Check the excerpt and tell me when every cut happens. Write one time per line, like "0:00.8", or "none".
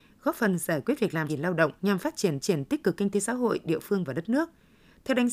0:01.3
0:01.8
0:02.4